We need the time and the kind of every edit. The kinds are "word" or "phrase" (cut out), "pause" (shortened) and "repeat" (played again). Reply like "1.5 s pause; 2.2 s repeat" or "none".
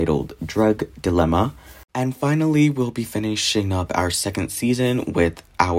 1.9 s pause